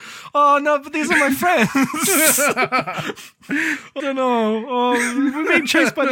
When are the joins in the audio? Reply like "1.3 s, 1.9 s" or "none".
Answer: 4.0 s